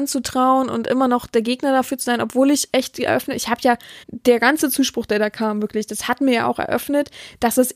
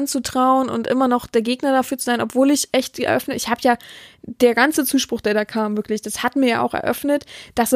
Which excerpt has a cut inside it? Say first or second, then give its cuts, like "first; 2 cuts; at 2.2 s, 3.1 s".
first; 1 cut; at 4.0 s